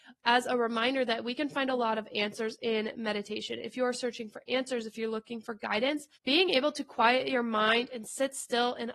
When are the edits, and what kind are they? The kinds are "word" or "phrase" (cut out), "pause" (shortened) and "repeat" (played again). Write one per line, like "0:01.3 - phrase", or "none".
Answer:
0:06.2 - pause